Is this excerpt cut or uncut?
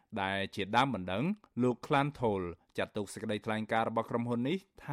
uncut